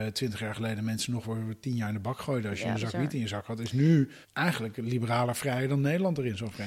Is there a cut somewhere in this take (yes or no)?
yes